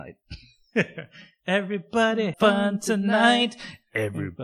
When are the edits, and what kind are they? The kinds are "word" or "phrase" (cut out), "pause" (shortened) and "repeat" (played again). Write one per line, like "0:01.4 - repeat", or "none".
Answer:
0:02.3 - word